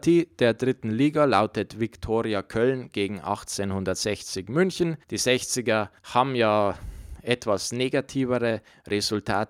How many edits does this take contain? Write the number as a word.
two